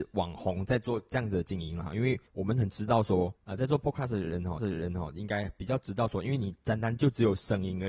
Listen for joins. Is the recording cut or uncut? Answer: cut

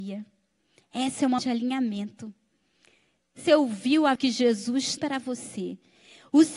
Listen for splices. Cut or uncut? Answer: cut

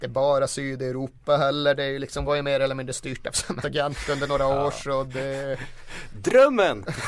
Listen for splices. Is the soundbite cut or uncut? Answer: cut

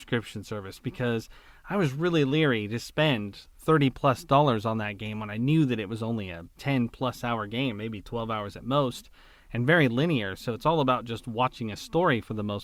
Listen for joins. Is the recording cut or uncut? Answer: cut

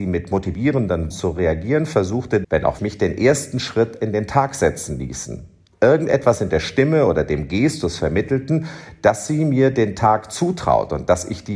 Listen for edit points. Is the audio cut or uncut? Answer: cut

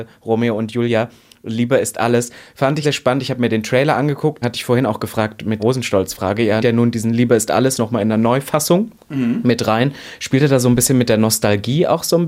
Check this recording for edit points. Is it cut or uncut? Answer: cut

